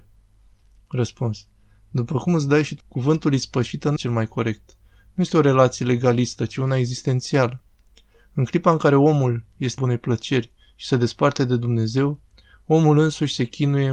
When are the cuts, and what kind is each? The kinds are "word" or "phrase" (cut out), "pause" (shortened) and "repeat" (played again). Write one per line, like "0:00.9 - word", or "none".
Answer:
0:02.8 - word
0:04.0 - word
0:09.8 - word